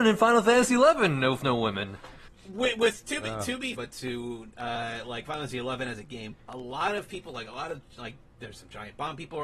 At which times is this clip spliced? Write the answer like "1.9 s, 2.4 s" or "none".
2.3 s, 3.7 s, 6.4 s